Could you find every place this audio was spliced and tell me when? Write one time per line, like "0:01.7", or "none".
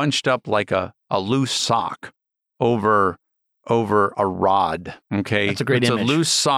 0:05.0

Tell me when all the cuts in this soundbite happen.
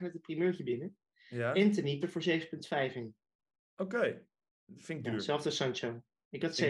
0:02.0

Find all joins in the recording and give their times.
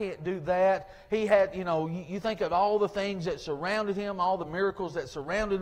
none

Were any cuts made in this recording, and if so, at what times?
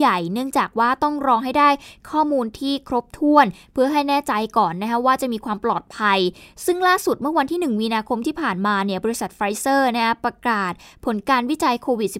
none

